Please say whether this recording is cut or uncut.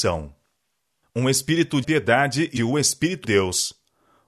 cut